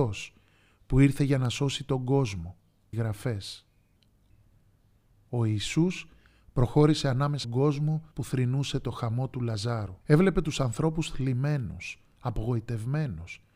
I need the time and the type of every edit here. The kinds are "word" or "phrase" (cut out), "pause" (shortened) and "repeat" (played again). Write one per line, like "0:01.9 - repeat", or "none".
0:02.9 - phrase
0:07.4 - word
0:08.1 - pause
0:10.0 - pause